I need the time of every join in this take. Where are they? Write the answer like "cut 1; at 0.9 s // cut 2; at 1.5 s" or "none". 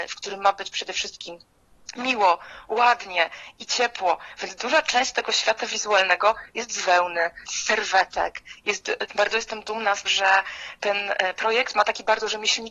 cut 1; at 7.4 s // cut 2; at 9.1 s // cut 3; at 10.1 s

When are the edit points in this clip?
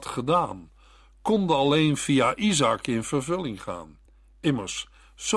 none

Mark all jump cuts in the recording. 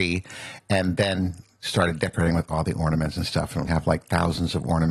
cut 1; at 3.7 s

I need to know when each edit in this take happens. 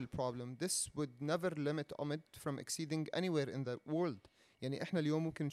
none

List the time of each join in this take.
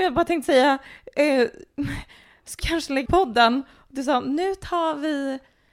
cut 1; at 2.6 s // cut 2; at 3.1 s

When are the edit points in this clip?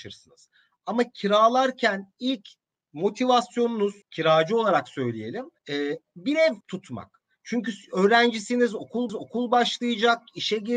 cut 1; at 4.0 s // cut 2; at 5.6 s // cut 3; at 6.6 s // cut 4; at 9.1 s

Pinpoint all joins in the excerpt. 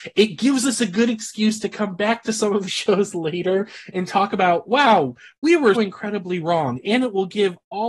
cut 1; at 2.7 s // cut 2; at 5.7 s

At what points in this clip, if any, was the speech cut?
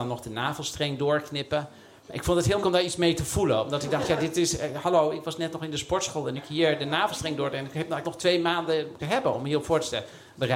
cut 1; at 2.6 s // cut 2; at 6.4 s // cut 3; at 8.0 s // cut 4; at 9.0 s

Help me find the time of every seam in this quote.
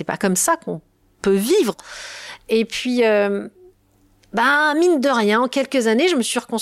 none

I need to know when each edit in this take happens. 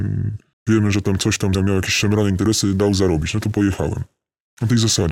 cut 1; at 1.5 s

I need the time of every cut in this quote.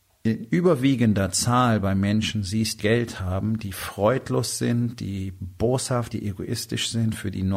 cut 1; at 2.8 s // cut 2; at 6.1 s

